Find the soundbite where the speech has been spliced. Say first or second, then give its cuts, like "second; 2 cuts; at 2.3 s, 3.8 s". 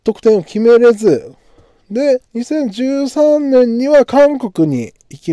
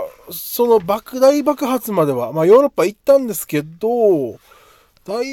first; 1 cut; at 2.2 s